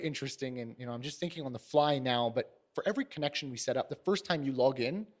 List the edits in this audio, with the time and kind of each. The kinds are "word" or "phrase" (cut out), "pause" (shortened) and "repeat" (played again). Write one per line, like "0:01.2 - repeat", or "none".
none

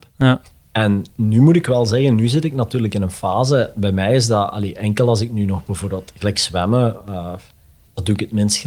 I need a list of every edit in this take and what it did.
none

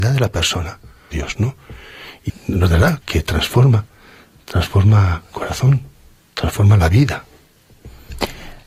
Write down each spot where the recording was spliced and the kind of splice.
0:01.1 - phrase
0:02.3 - phrase
0:03.0 - word
0:05.3 - word

